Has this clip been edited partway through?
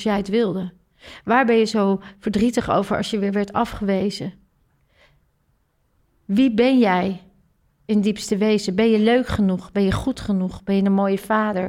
no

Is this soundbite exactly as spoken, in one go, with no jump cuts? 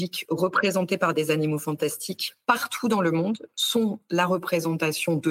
yes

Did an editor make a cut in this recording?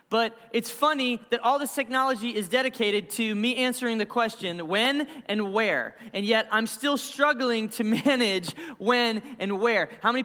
no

